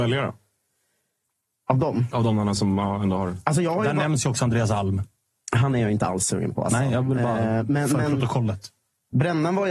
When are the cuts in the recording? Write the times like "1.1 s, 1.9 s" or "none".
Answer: none